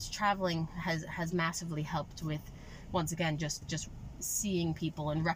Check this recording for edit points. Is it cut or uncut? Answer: uncut